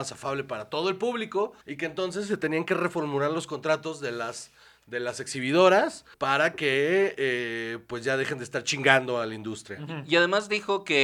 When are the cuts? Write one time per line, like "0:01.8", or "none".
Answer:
0:01.6
0:06.1